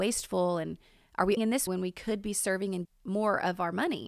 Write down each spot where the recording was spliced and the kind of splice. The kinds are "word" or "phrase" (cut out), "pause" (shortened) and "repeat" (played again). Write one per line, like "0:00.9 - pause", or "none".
0:01.4 - word
0:01.7 - word
0:02.8 - word